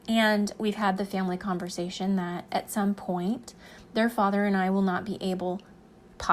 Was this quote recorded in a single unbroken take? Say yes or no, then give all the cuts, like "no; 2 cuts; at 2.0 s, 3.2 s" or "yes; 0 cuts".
yes; 0 cuts